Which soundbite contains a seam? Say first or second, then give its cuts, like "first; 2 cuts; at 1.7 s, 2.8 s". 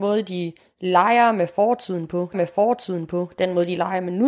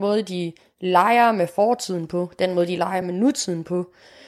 first; 1 cut; at 2.3 s